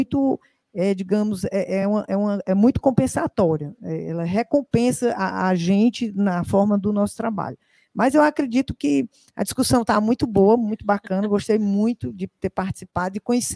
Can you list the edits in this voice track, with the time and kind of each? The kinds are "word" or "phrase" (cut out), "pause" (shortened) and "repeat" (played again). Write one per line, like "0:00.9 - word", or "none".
none